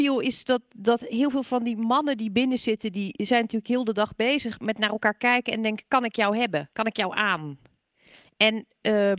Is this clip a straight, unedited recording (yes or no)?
no